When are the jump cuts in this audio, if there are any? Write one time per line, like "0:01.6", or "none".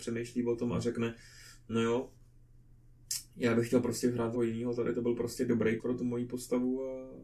0:04.3
0:05.8